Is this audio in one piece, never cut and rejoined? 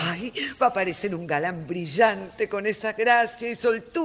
yes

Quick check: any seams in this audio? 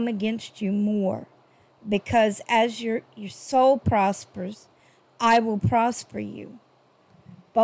no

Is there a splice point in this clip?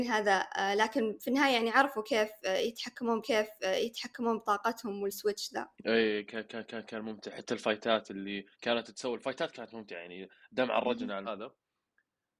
yes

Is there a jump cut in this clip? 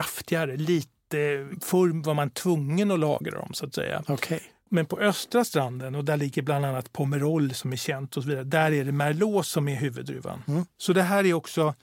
no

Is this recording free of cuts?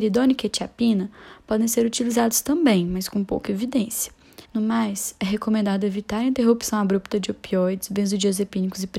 no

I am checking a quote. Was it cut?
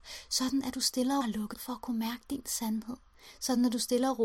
yes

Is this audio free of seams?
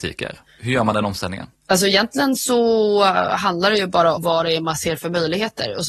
no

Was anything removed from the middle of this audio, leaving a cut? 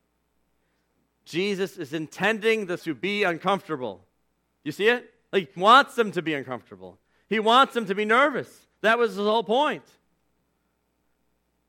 yes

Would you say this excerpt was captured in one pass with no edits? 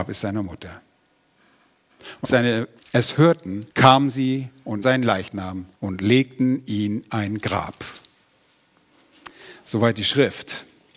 no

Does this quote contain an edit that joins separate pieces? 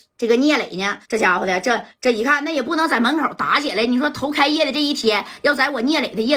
yes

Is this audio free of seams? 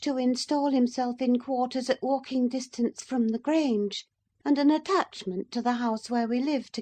yes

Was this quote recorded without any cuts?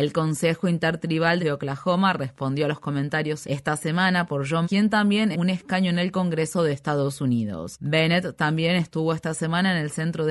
no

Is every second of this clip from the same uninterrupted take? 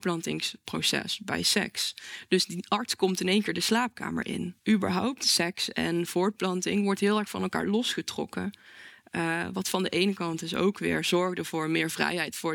no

